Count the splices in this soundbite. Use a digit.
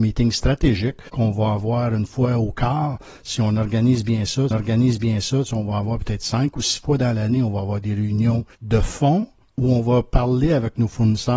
4